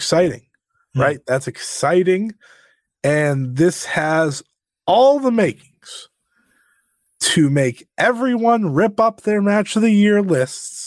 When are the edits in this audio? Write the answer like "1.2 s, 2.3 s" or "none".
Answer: none